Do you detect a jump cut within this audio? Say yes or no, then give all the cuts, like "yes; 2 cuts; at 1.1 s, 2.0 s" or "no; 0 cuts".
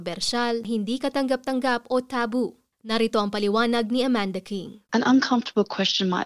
yes; 1 cut; at 4.9 s